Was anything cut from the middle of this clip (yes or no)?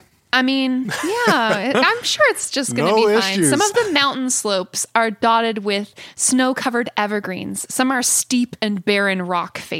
no